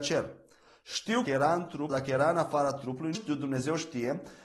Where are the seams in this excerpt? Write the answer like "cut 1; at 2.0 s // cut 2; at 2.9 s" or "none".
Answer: cut 1; at 1.2 s // cut 2; at 1.9 s // cut 3; at 3.1 s